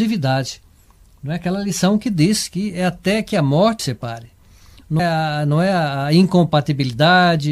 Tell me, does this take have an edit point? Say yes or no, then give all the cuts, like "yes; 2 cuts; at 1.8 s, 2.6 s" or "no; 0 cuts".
yes; 2 cuts; at 3.8 s, 5.0 s